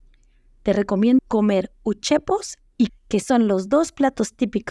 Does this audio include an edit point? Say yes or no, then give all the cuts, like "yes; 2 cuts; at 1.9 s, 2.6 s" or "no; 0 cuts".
yes; 2 cuts; at 1.2 s, 2.9 s